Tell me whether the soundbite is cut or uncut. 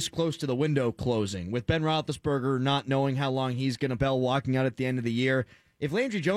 cut